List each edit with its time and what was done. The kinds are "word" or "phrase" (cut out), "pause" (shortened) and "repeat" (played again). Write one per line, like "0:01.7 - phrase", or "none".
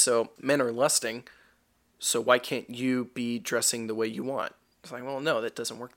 none